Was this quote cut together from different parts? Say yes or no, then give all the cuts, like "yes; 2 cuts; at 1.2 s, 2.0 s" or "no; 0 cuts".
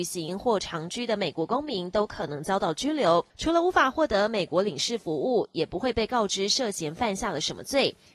yes; 1 cut; at 3.3 s